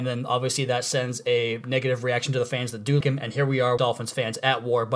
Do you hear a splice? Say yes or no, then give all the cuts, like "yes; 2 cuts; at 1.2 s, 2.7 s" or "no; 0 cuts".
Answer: yes; 2 cuts; at 3.0 s, 3.8 s